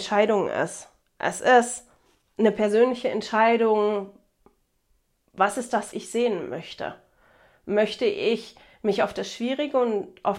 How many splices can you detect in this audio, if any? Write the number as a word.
one